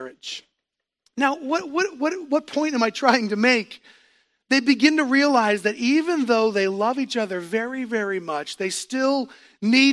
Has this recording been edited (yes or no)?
no